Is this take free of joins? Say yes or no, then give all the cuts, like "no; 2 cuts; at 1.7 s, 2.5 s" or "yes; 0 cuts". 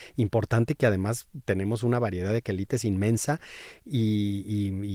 yes; 0 cuts